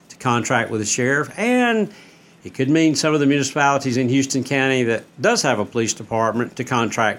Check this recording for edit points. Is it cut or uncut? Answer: uncut